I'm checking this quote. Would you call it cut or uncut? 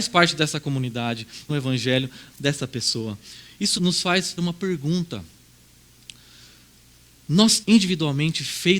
cut